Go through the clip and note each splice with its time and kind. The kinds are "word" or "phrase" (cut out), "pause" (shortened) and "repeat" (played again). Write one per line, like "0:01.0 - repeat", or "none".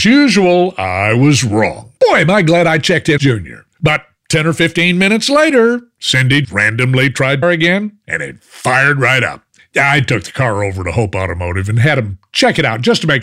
0:02.0 - pause
0:03.2 - word
0:03.7 - pause
0:06.4 - word
0:07.4 - phrase
0:09.6 - pause